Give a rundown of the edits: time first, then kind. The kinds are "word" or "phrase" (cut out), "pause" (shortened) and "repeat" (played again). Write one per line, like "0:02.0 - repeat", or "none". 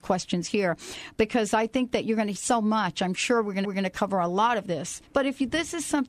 0:02.3 - word
0:03.6 - repeat
0:05.1 - pause

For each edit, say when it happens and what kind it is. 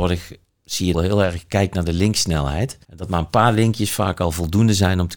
0:00.9 - phrase
0:02.8 - pause

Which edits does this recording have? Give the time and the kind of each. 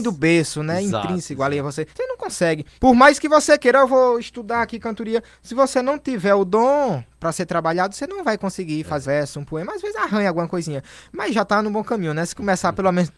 0:01.9 - pause
0:02.8 - pause
0:09.0 - word

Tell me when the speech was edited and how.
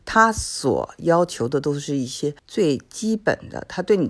0:02.4 - pause

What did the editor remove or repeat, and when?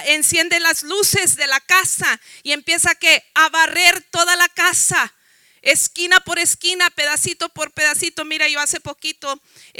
none

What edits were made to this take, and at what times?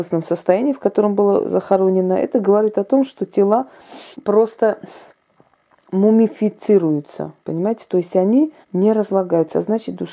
0:04.1 - pause
0:07.4 - pause
0:08.6 - pause

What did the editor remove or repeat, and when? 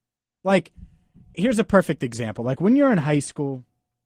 0:01.3 - word

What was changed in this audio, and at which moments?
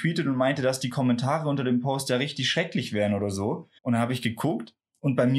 0:03.8 - pause

